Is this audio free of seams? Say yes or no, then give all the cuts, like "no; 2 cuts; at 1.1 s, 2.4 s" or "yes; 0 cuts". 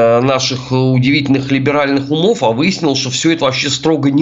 yes; 0 cuts